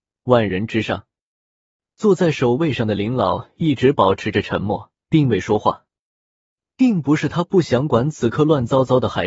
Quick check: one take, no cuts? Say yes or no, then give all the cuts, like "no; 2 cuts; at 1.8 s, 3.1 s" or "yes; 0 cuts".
no; 1 cut; at 5.0 s